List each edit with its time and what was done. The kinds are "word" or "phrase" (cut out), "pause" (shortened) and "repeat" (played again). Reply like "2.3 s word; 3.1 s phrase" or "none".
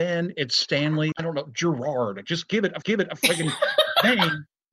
1.1 s word; 2.8 s repeat